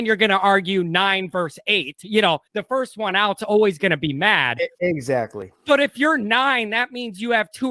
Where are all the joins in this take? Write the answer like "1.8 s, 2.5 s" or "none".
2.5 s